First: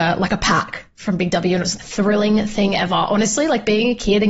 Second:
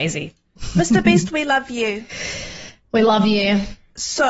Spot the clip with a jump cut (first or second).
first